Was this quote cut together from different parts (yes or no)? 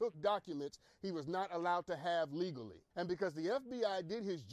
yes